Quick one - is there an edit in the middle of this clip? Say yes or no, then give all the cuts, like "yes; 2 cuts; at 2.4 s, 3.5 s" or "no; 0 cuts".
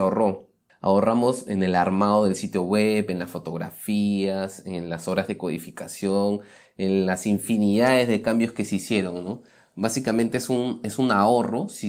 no; 0 cuts